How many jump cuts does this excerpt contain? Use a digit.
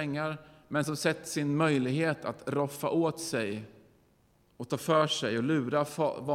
1